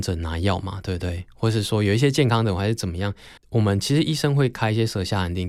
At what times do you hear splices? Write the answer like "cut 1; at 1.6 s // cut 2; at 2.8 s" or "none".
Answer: cut 1; at 3.4 s